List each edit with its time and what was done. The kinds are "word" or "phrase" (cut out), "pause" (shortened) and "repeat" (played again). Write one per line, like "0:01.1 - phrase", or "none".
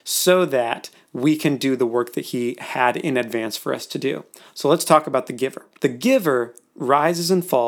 none